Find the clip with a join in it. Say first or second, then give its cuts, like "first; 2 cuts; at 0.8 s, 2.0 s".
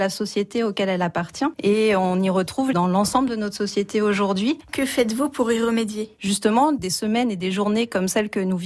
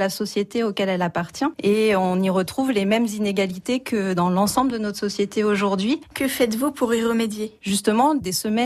first; 1 cut; at 2.7 s